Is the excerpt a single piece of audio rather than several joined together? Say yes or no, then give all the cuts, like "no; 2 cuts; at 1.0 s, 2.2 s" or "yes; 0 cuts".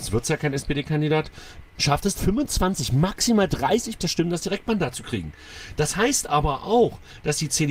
no; 3 cuts; at 1.7 s, 2.1 s, 4.0 s